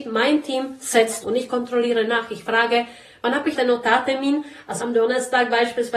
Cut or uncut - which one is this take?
cut